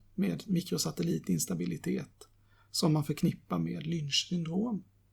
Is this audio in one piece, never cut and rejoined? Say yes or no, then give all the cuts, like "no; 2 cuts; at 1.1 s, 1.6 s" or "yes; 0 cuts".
yes; 0 cuts